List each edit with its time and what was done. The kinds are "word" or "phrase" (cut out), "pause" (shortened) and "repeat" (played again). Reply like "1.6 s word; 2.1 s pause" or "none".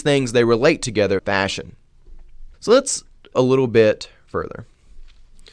1.2 s phrase; 2.5 s pause; 3.3 s word